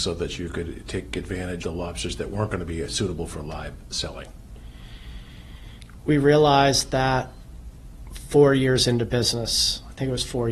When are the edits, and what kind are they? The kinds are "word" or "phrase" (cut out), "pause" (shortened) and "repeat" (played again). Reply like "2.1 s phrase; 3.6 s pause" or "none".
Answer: 1.6 s word